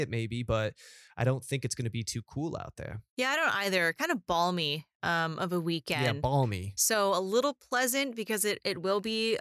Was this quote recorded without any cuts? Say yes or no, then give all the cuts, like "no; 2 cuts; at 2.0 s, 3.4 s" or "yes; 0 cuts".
yes; 0 cuts